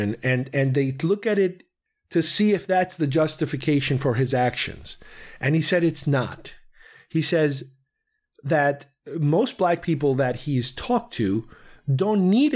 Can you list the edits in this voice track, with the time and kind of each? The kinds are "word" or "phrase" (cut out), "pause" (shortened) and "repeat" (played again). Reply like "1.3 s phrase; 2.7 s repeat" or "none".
none